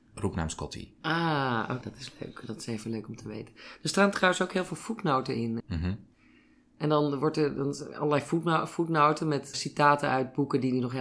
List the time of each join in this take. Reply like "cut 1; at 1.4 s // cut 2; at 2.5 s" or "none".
cut 1; at 1.8 s // cut 2; at 5.6 s // cut 3; at 9.5 s